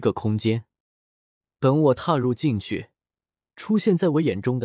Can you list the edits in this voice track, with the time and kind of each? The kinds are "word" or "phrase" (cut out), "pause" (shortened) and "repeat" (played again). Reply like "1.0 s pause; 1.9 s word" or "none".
none